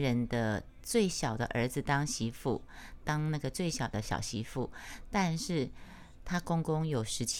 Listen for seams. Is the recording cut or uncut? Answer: cut